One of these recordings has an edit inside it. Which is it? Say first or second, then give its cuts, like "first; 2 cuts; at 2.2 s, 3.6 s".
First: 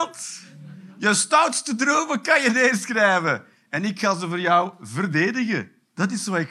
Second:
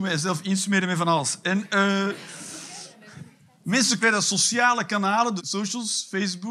second; 2 cuts; at 4.0 s, 5.4 s